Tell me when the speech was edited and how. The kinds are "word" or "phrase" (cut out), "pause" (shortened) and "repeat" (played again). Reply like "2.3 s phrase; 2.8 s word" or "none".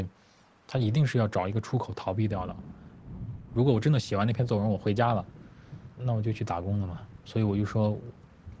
7.2 s pause